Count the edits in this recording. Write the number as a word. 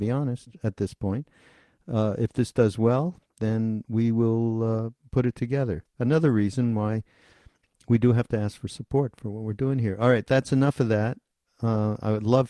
zero